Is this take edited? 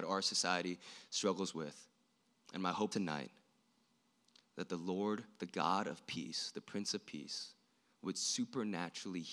yes; 1 cut; at 2.9 s

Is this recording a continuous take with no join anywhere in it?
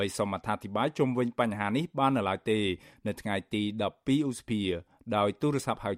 yes; 0 cuts

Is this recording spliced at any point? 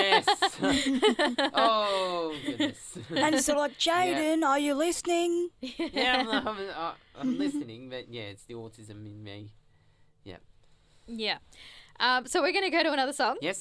no; 0 cuts

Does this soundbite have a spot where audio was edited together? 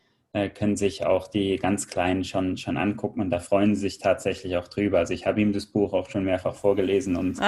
no; 0 cuts

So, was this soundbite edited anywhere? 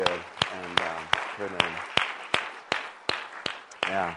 yes; 1 cut; at 1.5 s

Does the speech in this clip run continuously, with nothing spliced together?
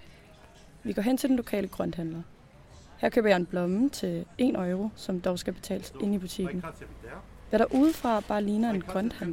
yes; 0 cuts

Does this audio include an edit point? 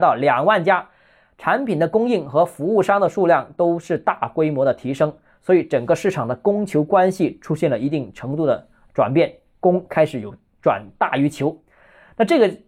no; 0 cuts

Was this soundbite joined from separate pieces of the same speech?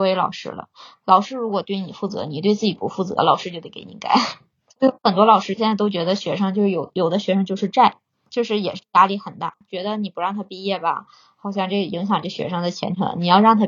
no; 0 cuts

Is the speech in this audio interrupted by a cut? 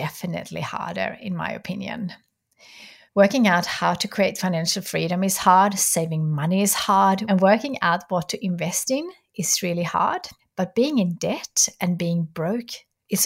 no; 0 cuts

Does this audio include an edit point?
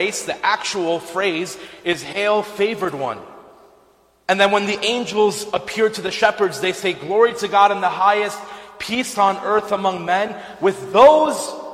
no; 0 cuts

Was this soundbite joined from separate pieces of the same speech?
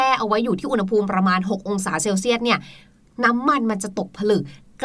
no; 0 cuts

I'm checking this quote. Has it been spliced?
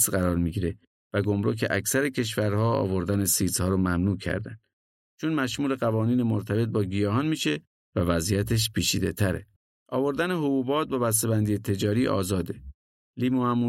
yes; 1 cut; at 9.6 s

